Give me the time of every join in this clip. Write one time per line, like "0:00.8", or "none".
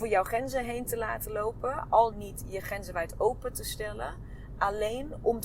0:02.1
0:02.6

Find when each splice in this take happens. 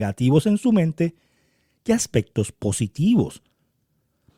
none

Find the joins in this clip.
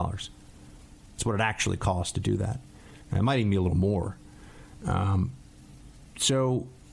0:03.0

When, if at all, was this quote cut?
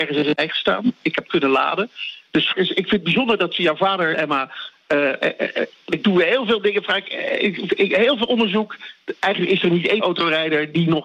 0:01.3
0:02.5
0:04.1
0:10.0

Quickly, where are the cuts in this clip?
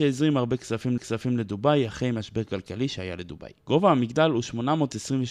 0:01.0
0:03.6

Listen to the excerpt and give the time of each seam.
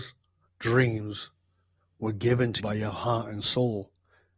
0:02.6

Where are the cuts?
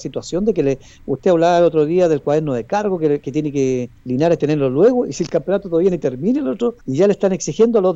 0:04.0
0:06.8

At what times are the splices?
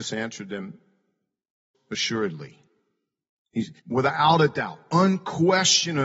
0:01.7
0:03.8

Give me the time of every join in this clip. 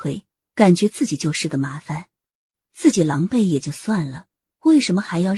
none

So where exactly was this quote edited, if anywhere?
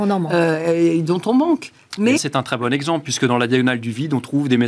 0:02.2

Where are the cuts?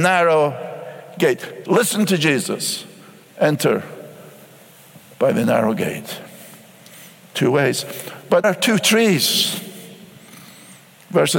0:08.4

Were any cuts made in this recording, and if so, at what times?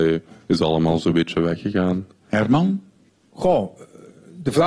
none

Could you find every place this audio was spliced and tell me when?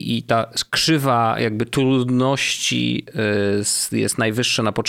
none

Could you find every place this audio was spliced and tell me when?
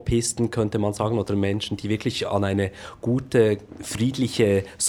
none

